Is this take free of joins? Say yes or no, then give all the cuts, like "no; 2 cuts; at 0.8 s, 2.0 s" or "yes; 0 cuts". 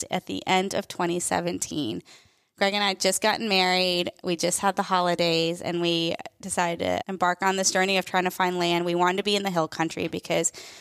yes; 0 cuts